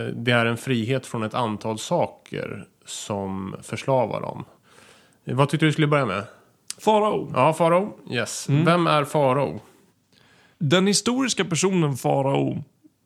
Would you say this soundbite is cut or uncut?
uncut